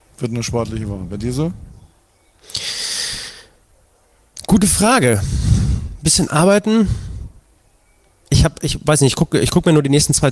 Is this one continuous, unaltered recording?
yes; 0 cuts

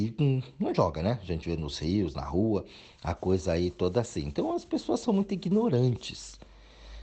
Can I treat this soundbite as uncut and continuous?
yes; 0 cuts

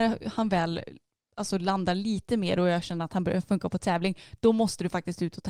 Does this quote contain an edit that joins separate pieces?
no; 0 cuts

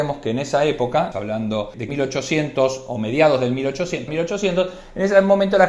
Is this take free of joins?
no; 3 cuts; at 1.1 s, 1.9 s, 4.1 s

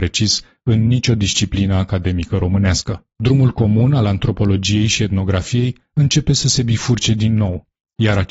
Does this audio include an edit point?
yes; 1 cut; at 3.1 s

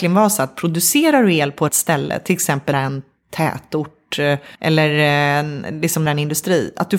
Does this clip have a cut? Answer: yes; 4 cuts; at 1.7 s, 2.7 s, 4.5 s, 6.1 s

